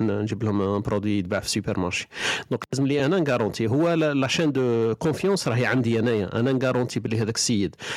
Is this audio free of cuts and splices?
yes; 0 cuts

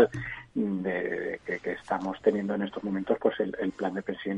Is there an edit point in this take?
no; 0 cuts

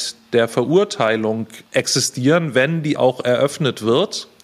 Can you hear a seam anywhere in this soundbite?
yes; 2 cuts; at 1.7 s, 3.0 s

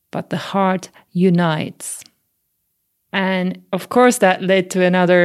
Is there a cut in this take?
no; 0 cuts

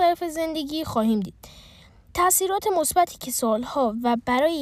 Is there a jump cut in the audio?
no; 0 cuts

